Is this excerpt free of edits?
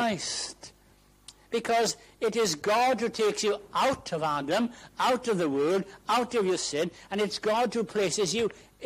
yes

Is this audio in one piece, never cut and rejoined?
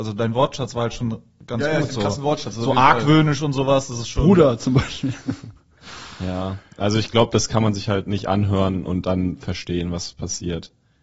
yes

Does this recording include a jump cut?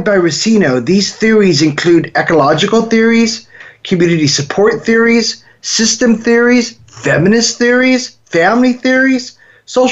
no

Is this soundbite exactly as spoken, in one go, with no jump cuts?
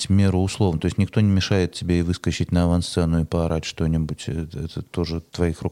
yes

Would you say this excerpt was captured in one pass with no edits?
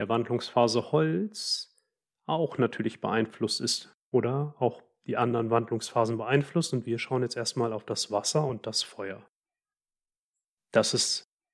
yes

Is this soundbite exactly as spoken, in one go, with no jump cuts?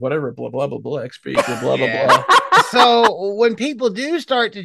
yes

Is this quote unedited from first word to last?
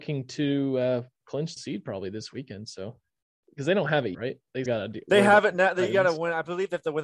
no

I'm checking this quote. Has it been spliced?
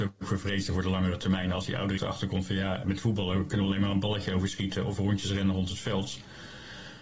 yes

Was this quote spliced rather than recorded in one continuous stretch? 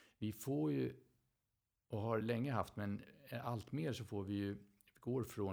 no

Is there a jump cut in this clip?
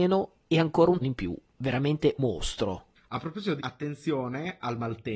yes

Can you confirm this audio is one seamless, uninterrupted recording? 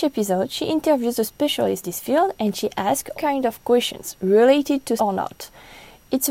no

